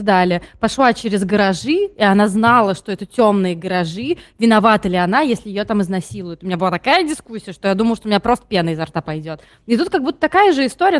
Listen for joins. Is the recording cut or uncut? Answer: uncut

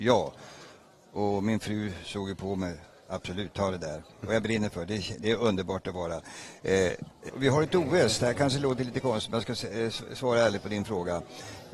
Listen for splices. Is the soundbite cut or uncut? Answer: cut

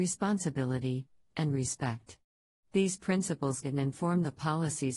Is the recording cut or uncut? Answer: cut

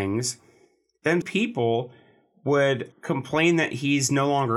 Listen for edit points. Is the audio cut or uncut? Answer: cut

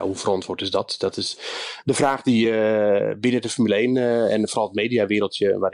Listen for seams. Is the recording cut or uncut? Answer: uncut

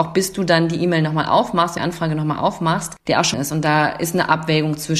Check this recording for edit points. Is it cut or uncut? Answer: cut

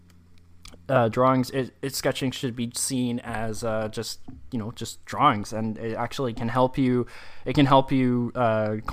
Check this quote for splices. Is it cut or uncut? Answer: uncut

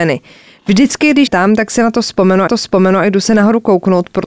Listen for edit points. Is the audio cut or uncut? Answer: cut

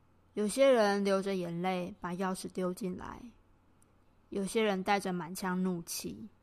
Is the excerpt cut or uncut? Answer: uncut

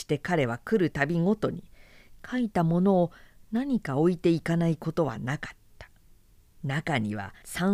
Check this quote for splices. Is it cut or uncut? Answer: uncut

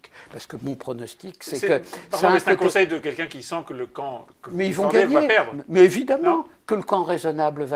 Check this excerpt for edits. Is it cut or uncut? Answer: uncut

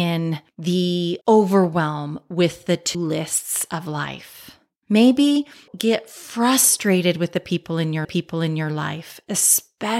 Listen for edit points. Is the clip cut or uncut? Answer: cut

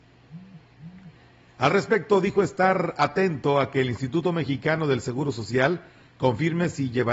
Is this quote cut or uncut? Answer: uncut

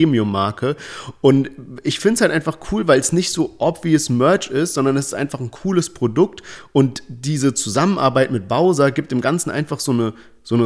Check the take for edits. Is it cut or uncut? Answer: uncut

